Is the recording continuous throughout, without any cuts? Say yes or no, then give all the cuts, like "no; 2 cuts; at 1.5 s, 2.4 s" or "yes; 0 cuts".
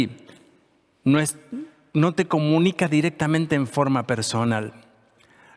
yes; 0 cuts